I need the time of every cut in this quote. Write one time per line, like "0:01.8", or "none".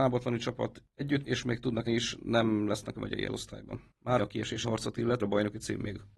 0:01.2
0:01.9
0:02.9
0:03.3
0:04.2
0:04.6
0:05.2